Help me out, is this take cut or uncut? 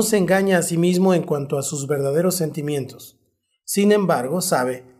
uncut